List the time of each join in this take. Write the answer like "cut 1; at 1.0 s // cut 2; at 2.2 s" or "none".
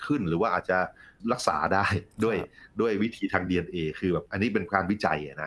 none